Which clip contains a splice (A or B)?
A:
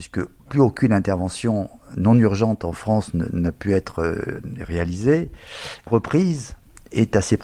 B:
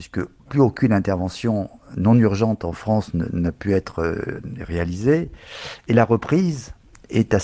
A